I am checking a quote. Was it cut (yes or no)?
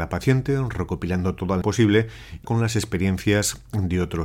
yes